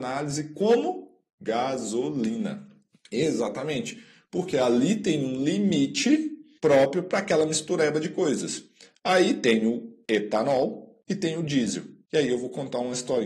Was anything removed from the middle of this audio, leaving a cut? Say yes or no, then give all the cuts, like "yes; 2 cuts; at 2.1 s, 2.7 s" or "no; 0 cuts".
no; 0 cuts